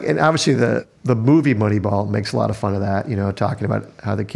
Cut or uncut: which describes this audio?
uncut